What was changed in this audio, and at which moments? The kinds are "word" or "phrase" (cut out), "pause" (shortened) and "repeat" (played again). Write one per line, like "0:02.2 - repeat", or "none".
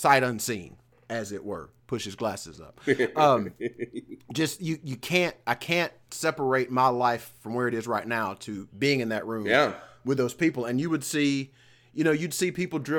none